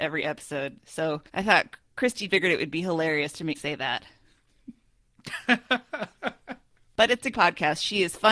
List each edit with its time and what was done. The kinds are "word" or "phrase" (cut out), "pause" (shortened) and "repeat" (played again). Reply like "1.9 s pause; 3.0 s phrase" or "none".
1.3 s pause; 2.3 s word; 3.5 s word; 7.3 s word